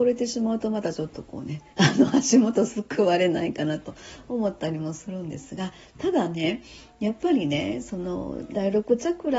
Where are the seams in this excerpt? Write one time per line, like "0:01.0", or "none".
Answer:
0:01.7